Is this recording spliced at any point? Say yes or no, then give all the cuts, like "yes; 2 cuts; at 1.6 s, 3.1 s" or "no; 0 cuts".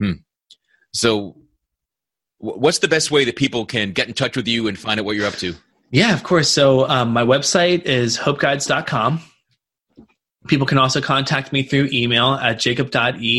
no; 0 cuts